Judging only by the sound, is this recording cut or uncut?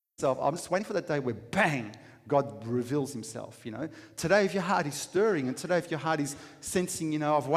uncut